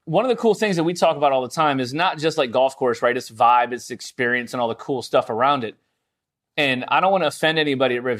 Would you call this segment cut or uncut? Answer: uncut